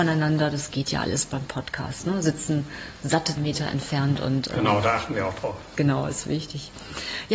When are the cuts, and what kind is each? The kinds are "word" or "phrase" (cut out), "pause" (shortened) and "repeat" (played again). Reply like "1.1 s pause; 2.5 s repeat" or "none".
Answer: 3.4 s word